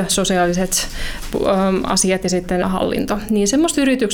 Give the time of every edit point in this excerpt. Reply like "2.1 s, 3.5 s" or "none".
2.6 s